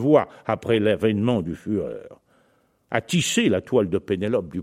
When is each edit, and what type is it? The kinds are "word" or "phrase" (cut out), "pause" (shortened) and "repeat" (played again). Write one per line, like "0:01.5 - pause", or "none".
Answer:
none